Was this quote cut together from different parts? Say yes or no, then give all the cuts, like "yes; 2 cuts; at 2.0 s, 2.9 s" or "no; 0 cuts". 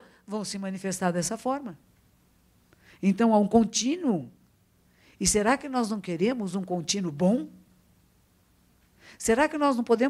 no; 0 cuts